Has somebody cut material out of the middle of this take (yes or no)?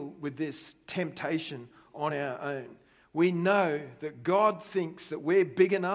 no